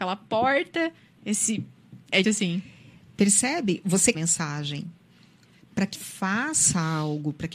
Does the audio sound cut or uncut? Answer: cut